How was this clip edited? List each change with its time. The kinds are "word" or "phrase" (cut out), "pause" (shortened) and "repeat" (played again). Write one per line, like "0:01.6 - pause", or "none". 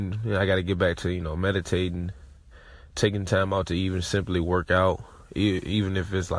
none